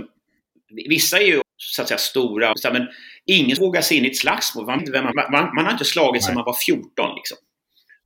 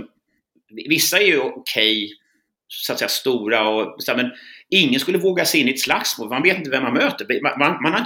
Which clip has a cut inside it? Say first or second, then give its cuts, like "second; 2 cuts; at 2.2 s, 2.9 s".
first; 5 cuts; at 1.4 s, 2.5 s, 3.6 s, 4.8 s, 5.1 s